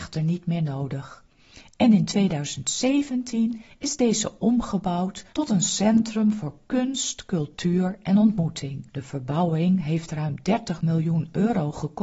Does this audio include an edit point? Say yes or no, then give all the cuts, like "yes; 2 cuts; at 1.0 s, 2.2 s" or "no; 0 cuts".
yes; 2 cuts; at 5.3 s, 8.9 s